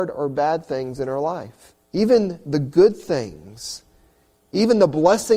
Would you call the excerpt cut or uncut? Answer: cut